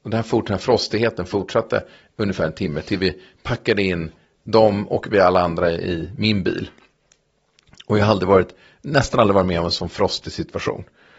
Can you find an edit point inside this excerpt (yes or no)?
no